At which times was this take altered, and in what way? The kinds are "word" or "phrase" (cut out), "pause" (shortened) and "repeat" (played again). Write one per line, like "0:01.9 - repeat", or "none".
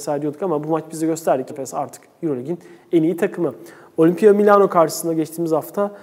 0:01.5 - word